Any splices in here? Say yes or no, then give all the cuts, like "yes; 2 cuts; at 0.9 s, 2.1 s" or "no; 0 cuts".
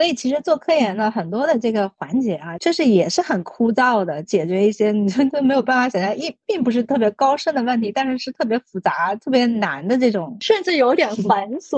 no; 0 cuts